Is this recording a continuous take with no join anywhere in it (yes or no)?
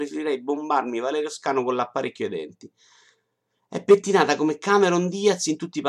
yes